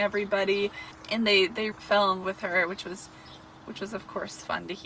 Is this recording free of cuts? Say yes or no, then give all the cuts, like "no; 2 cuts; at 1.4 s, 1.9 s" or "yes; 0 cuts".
no; 2 cuts; at 1.7 s, 2.2 s